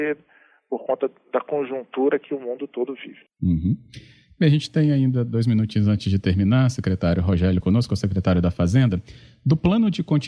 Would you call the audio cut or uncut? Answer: cut